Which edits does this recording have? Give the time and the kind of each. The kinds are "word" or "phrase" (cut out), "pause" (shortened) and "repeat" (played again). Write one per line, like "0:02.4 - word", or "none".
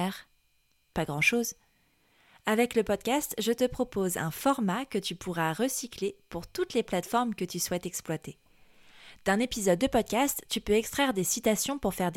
none